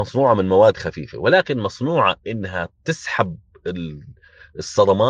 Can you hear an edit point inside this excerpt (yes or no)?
yes